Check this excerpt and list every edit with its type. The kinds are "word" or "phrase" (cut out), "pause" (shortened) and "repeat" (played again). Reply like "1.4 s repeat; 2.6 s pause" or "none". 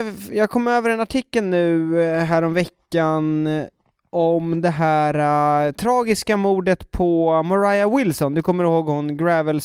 none